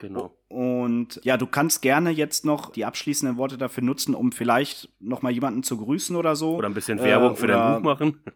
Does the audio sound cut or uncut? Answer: cut